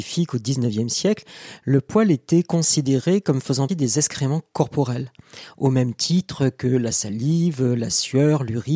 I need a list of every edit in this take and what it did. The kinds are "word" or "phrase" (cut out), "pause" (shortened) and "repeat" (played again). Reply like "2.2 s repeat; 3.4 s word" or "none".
3.7 s word